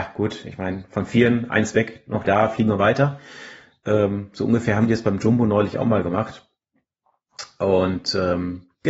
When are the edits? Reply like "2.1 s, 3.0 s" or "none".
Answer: 2.2 s